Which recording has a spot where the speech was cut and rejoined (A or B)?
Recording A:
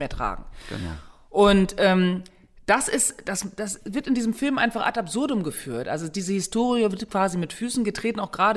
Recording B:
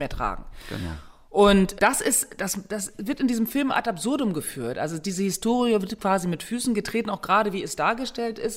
B